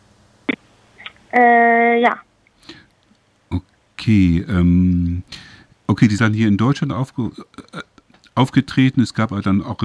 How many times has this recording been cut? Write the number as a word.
two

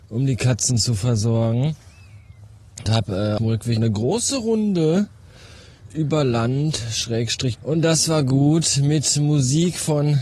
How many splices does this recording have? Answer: four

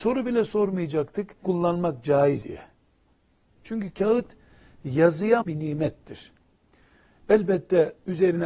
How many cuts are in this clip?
three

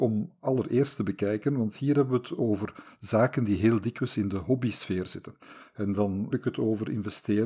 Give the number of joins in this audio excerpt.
one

